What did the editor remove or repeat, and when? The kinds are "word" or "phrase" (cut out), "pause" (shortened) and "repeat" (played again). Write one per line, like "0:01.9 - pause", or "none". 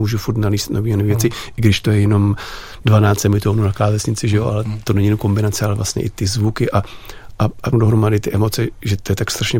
0:07.7 - word